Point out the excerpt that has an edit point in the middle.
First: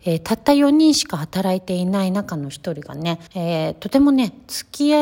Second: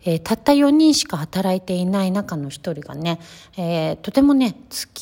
first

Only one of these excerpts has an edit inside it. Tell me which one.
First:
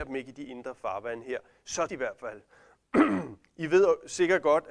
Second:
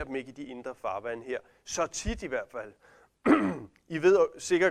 first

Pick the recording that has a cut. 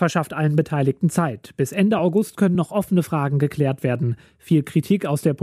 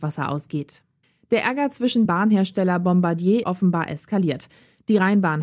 second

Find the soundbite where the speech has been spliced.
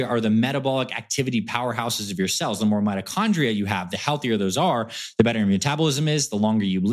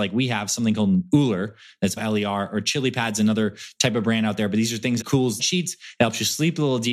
second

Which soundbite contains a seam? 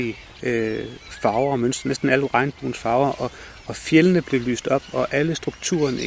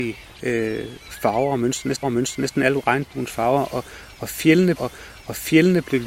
second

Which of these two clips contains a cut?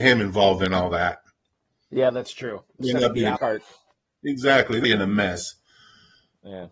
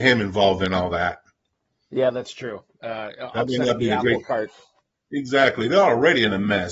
first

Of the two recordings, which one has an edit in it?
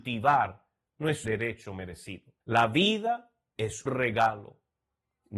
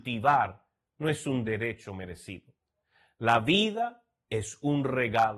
first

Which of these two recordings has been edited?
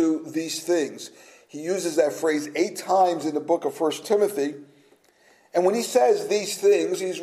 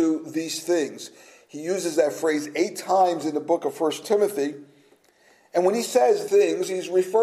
second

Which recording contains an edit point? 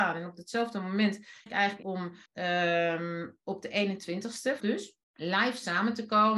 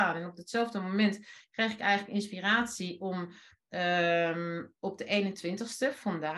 first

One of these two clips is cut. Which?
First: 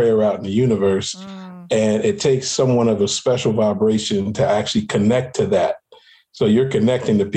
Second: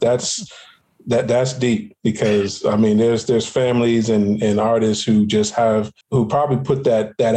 second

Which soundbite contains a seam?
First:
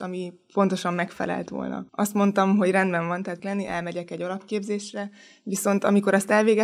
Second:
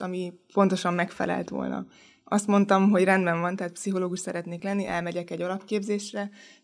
first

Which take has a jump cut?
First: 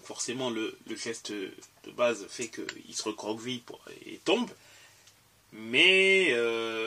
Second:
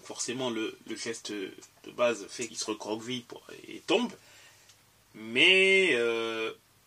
second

